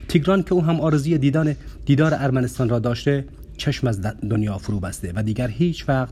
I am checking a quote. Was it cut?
no; 0 cuts

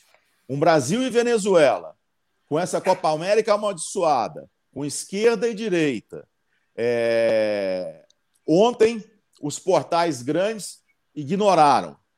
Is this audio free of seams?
yes; 0 cuts

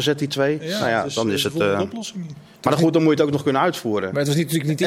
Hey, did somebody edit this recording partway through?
no; 0 cuts

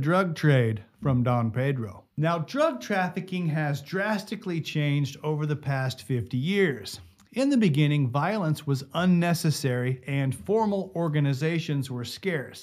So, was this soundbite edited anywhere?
yes; 1 cut; at 2.1 s

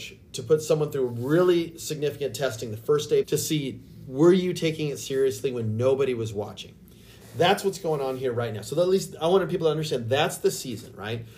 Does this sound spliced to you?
yes; 1 cut; at 3.2 s

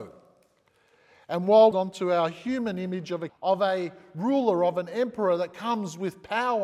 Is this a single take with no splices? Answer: no; 2 cuts; at 1.7 s, 3.3 s

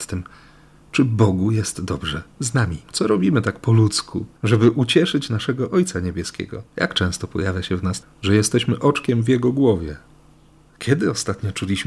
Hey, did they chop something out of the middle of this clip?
yes; 4 cuts; at 2.8 s, 4.4 s, 6.7 s, 8.0 s

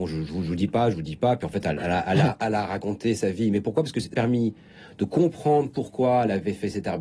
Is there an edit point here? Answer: yes; 1 cut; at 4.1 s

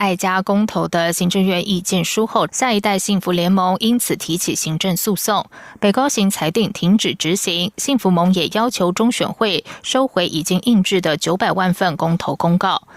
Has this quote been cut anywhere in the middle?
yes; 1 cut; at 2.5 s

